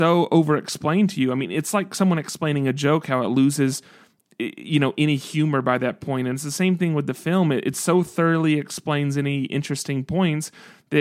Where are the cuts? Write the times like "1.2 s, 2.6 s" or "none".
none